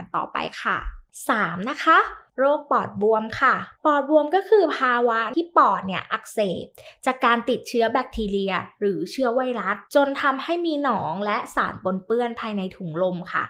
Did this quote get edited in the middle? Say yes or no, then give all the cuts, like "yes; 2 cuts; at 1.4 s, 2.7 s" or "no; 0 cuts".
yes; 2 cuts; at 3.7 s, 9.9 s